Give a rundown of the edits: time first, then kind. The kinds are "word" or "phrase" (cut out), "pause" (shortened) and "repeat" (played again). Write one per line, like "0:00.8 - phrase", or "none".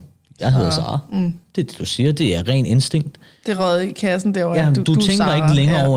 none